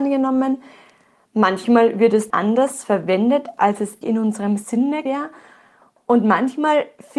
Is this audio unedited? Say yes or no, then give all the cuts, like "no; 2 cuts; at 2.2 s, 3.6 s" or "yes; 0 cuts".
no; 3 cuts; at 2.3 s, 4.0 s, 5.1 s